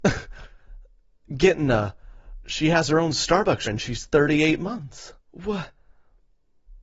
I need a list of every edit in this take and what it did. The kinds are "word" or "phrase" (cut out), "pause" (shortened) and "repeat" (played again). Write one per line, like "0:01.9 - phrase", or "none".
0:03.7 - word
0:05.2 - pause

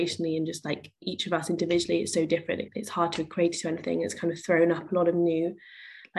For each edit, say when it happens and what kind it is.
0:02.7 - phrase

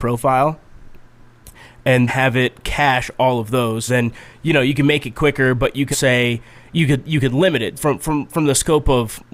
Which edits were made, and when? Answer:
0:02.1 - word
0:03.9 - word
0:05.9 - word
0:07.7 - word

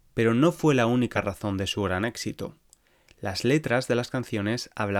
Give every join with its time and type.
none

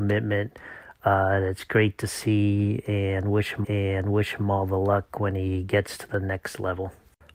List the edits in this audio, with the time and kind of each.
0:03.6 - repeat

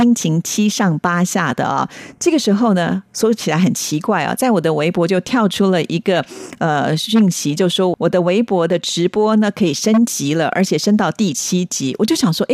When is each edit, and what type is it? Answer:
none

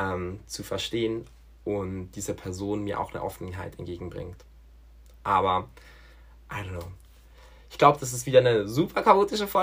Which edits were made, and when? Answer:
none

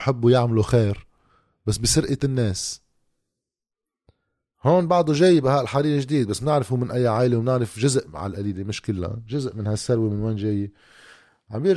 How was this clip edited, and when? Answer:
none

